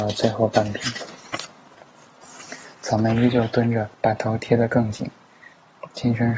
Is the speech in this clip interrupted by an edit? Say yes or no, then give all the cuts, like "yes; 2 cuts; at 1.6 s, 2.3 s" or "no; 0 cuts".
yes; 1 cut; at 3.9 s